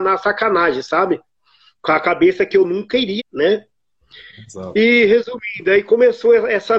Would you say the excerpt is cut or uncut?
cut